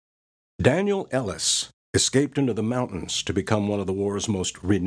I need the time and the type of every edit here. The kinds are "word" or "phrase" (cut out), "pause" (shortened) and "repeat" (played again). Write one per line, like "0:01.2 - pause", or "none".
0:01.8 - pause